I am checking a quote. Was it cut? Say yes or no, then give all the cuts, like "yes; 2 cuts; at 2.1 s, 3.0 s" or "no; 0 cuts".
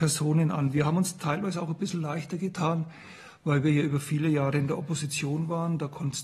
no; 0 cuts